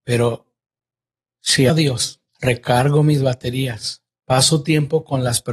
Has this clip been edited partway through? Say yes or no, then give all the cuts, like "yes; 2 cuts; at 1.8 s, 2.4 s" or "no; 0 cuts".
yes; 2 cuts; at 1.7 s, 2.3 s